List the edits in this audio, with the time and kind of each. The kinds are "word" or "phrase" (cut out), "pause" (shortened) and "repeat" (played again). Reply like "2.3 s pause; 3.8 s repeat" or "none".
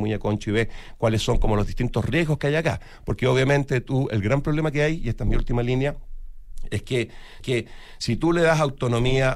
7.4 s repeat